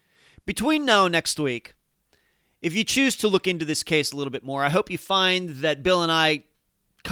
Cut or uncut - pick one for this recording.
uncut